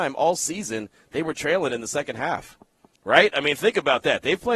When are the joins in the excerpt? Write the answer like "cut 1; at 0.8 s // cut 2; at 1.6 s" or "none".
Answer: none